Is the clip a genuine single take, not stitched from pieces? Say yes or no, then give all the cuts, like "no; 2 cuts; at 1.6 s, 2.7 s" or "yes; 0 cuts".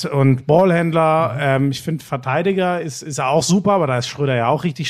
yes; 0 cuts